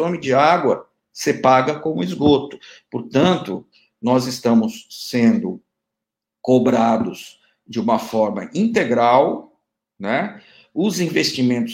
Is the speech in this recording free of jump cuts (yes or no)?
yes